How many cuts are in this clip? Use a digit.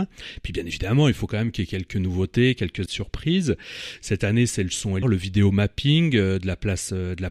2